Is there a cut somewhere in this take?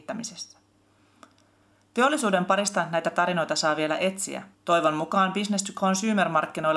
yes; 1 cut; at 4.5 s

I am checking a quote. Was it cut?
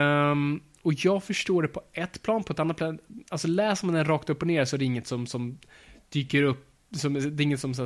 no; 0 cuts

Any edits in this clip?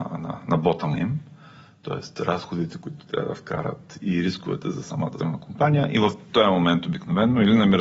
yes; 2 cuts; at 0.9 s, 5.2 s

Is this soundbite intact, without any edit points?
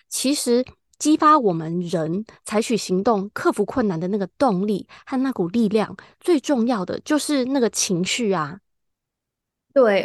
yes; 0 cuts

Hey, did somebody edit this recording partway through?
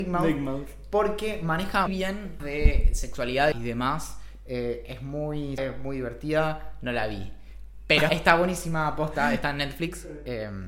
yes; 5 cuts; at 1.9 s, 2.4 s, 3.5 s, 5.6 s, 8.1 s

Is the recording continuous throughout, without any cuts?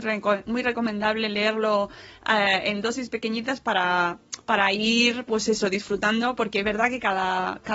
yes; 0 cuts

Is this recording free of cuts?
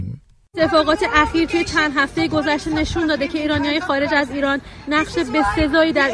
yes; 0 cuts

